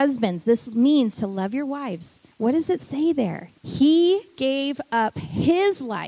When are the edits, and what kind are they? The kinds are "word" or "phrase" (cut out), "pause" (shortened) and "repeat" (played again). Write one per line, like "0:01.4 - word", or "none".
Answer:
0:02.3 - pause
0:03.6 - pause